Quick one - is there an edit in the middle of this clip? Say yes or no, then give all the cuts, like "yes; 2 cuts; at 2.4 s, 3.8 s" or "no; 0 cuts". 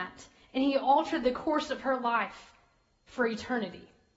no; 0 cuts